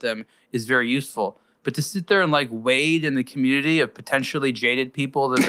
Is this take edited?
no; 0 cuts

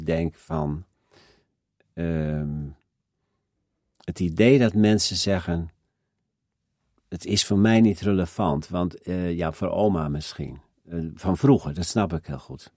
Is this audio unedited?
yes; 0 cuts

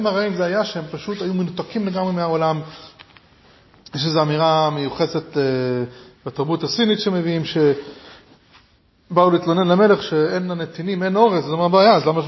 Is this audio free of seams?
yes; 0 cuts

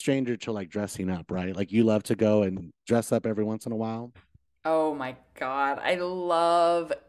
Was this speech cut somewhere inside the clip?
no; 0 cuts

